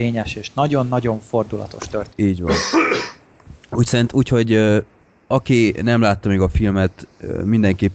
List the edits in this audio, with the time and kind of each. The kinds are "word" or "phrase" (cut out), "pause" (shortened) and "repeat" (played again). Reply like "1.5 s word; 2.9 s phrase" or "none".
none